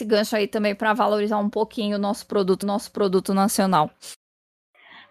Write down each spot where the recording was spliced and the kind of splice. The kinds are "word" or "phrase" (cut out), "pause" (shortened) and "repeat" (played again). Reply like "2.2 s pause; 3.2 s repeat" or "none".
2.6 s repeat